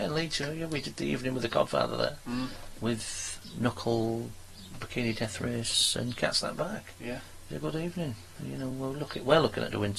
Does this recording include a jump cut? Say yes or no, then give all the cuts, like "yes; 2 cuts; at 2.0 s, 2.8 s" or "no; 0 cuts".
no; 0 cuts